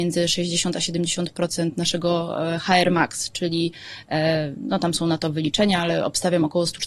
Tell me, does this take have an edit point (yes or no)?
no